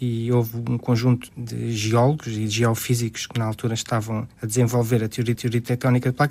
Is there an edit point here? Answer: yes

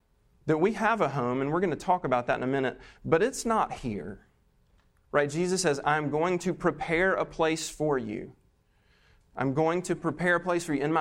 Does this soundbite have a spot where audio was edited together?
no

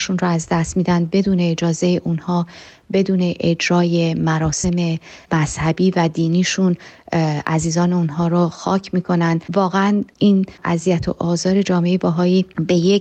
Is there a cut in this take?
yes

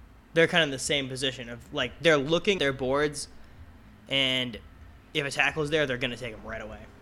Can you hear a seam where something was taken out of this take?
yes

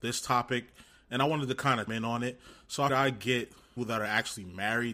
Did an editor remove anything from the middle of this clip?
yes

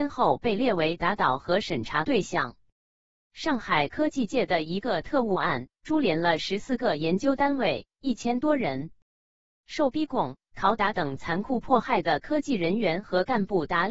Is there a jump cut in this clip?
no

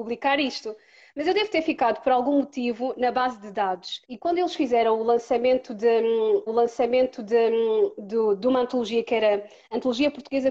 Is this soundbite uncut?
no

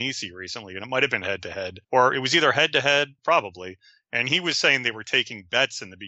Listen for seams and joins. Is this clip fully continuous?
no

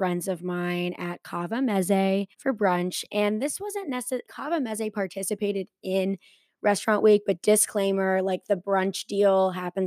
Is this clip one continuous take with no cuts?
no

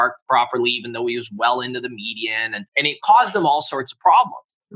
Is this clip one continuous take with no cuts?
no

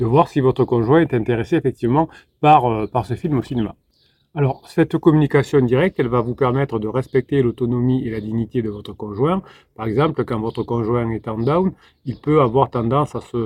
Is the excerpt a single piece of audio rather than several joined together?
yes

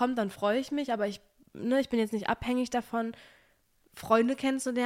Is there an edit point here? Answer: no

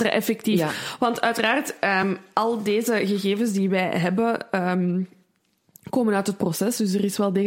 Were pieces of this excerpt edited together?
no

